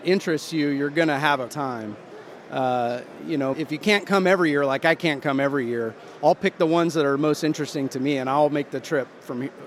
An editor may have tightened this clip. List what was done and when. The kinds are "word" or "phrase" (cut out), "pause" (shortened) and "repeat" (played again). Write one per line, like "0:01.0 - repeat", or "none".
0:01.5 - word
0:03.5 - word